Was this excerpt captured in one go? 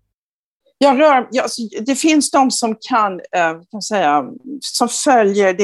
yes; 0 cuts

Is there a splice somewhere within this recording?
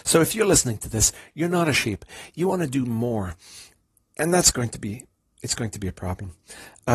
no; 0 cuts

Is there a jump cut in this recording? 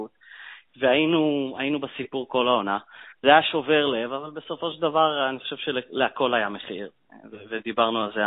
yes; 1 cut; at 3.1 s

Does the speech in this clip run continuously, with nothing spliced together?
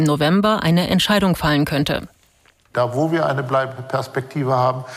yes; 0 cuts

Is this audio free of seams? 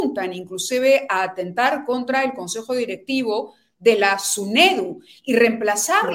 yes; 0 cuts

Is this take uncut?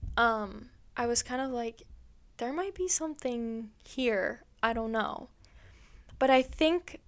yes; 0 cuts

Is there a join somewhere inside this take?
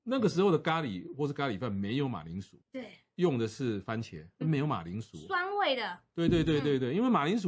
yes; 2 cuts; at 2.6 s, 4.4 s

